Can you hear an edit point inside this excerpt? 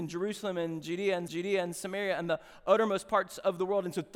yes; 1 cut; at 1.3 s

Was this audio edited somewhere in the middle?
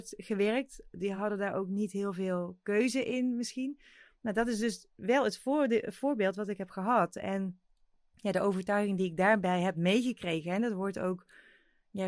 no; 0 cuts

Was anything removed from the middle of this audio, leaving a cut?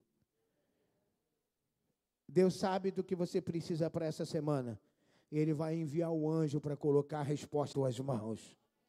yes; 1 cut; at 7.7 s

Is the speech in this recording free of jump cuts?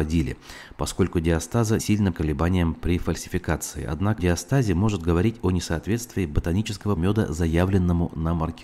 no; 4 cuts; at 1.8 s, 2.1 s, 4.2 s, 7.0 s

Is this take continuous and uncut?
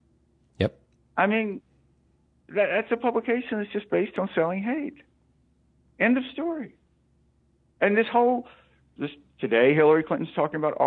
yes; 0 cuts

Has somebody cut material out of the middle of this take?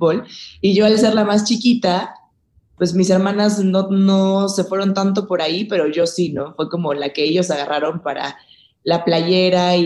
no; 0 cuts

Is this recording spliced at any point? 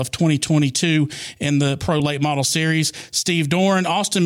no; 0 cuts

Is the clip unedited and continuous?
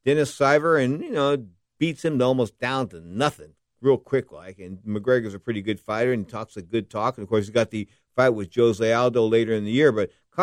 yes; 0 cuts

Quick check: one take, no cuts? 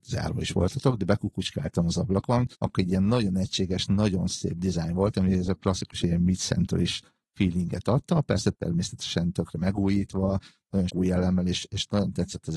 no; 2 cuts; at 2.5 s, 10.9 s

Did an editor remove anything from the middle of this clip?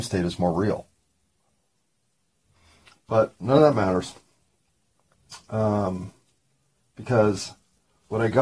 no; 0 cuts

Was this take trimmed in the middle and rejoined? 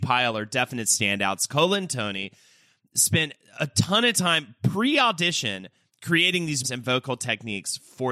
yes; 1 cut; at 6.6 s

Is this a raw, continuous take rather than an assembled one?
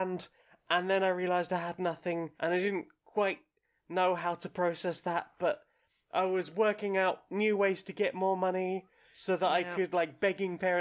no; 2 cuts; at 2.4 s, 3.0 s

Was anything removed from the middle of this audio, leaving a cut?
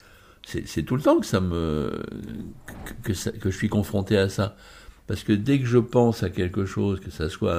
no; 0 cuts

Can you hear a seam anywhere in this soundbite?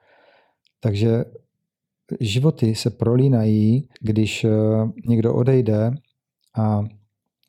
yes; 1 cut; at 3.9 s

